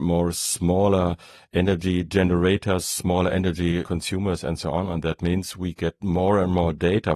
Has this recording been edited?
no; 0 cuts

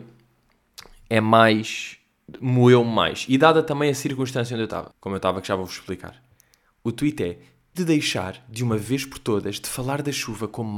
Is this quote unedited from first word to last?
no; 2 cuts; at 4.9 s, 7.8 s

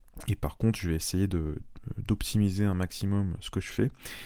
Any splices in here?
no; 0 cuts

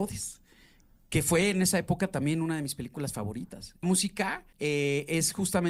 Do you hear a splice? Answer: yes; 2 cuts; at 3.8 s, 4.5 s

